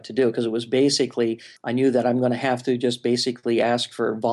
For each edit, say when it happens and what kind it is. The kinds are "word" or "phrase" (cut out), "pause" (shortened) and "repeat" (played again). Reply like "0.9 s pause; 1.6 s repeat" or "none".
1.6 s pause